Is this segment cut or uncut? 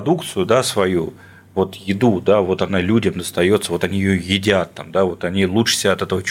uncut